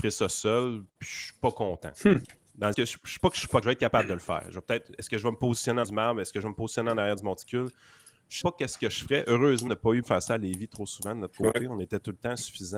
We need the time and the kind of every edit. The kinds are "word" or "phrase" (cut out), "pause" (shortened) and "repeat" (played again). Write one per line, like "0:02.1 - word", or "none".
0:02.7 - word
0:03.2 - word
0:03.6 - word
0:05.8 - word
0:08.4 - word
0:09.7 - word
0:10.0 - word